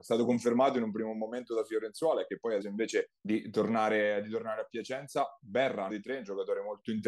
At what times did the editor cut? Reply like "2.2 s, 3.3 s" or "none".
2.6 s, 3.2 s, 5.9 s